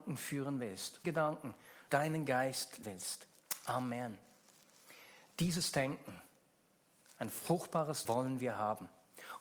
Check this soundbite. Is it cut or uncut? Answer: cut